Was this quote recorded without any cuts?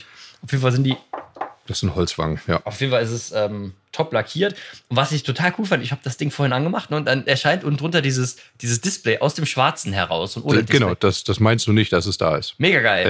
yes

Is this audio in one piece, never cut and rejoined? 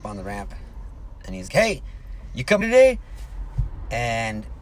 no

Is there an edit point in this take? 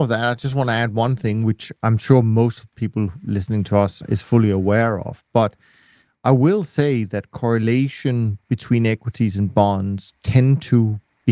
no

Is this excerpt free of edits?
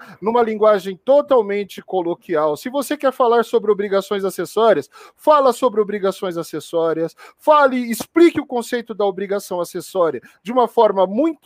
yes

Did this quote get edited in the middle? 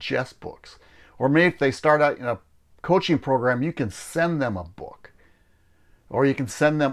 no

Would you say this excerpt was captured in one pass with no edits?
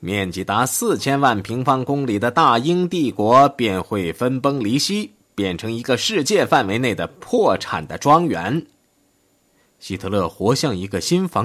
yes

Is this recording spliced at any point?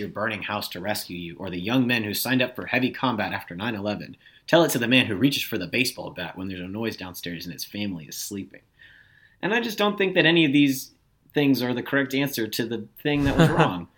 no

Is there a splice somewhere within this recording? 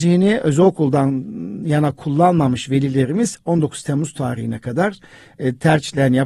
no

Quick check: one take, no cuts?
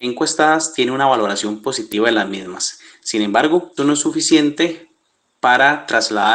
no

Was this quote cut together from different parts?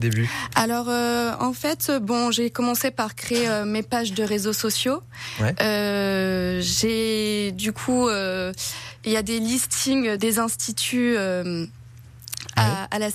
yes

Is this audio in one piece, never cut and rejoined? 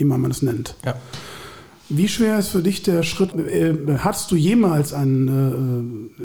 no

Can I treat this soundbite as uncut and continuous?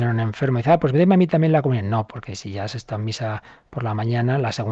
yes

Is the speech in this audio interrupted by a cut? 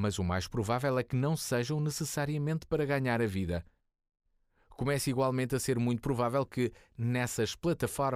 no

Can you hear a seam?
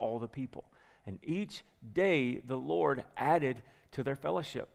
no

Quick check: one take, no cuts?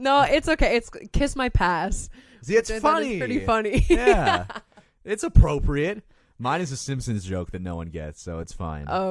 yes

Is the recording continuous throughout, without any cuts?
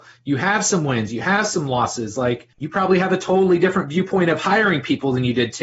no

